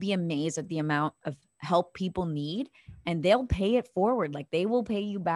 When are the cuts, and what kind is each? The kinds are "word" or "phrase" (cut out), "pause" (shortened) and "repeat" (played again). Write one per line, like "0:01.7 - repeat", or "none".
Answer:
none